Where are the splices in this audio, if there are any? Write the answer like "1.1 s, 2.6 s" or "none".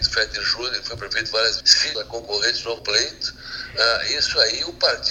1.6 s, 1.9 s, 2.8 s